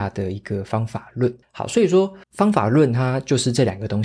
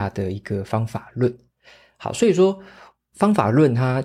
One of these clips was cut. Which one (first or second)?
first